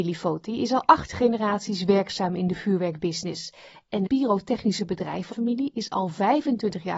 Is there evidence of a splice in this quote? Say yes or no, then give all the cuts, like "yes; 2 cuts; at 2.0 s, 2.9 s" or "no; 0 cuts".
yes; 2 cuts; at 4.1 s, 5.3 s